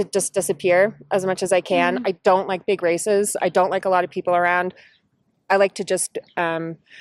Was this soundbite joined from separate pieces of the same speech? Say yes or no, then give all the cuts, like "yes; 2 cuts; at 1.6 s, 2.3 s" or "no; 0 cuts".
no; 0 cuts